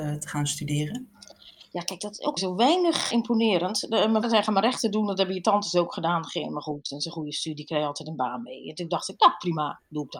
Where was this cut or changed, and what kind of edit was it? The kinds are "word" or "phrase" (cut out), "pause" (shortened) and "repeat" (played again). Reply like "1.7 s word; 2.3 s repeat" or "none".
2.4 s word; 3.1 s word; 4.2 s word

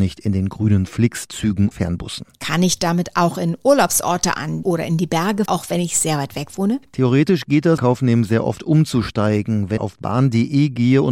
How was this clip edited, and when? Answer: 1.7 s word; 4.6 s phrase; 5.5 s word; 7.8 s phrase; 9.8 s word

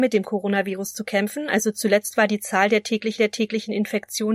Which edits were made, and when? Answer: 3.2 s repeat

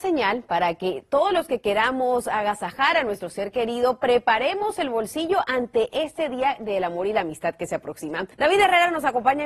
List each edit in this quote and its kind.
8.3 s pause

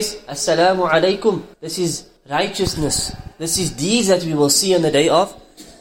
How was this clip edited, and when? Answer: 1.5 s pause; 2.2 s pause

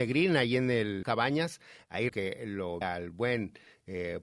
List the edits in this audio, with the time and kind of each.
1.0 s word; 2.1 s word; 2.8 s word

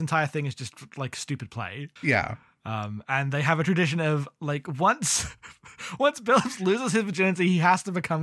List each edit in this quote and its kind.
2.0 s pause

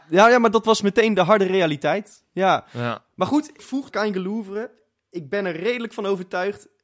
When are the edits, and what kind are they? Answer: 3.6 s word; 3.9 s phrase

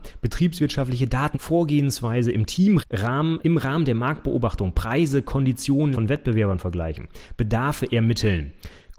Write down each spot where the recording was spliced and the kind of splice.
1.3 s word; 2.8 s word; 3.4 s word; 5.9 s word

